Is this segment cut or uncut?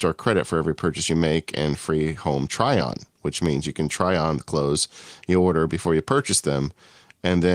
uncut